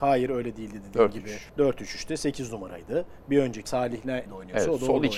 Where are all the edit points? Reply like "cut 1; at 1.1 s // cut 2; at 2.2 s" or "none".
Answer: cut 1; at 1.5 s // cut 2; at 3.7 s // cut 3; at 4.3 s